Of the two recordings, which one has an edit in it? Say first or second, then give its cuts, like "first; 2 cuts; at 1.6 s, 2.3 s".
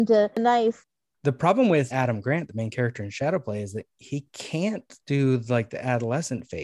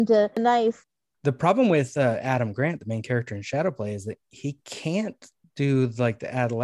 first; 2 cuts; at 1.9 s, 5.0 s